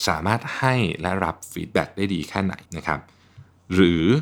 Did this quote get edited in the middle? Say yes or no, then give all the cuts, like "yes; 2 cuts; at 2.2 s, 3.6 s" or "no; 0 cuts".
yes; 1 cut; at 2.6 s